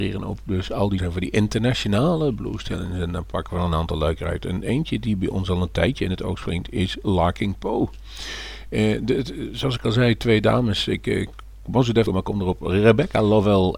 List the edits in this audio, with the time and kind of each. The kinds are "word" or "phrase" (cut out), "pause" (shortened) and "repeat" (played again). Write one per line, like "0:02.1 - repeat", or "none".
0:01.0 - phrase
0:12.1 - word